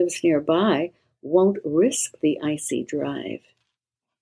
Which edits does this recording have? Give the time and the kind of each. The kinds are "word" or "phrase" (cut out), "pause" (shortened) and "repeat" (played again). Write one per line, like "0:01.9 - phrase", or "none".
none